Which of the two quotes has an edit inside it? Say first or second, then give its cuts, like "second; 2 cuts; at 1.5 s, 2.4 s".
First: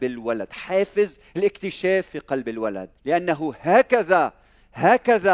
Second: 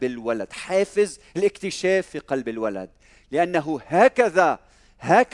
first; 1 cut; at 3.0 s